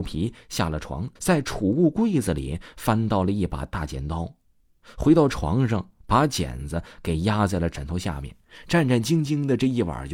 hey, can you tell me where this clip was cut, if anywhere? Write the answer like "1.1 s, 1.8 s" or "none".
1.2 s